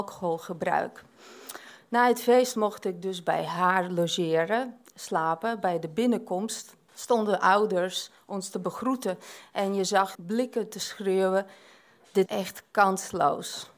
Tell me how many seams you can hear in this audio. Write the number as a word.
three